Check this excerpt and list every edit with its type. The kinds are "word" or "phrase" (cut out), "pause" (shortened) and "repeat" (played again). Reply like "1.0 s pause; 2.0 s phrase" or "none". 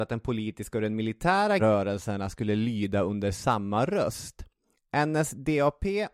1.6 s phrase